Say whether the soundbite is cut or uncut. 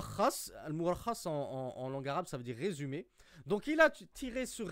uncut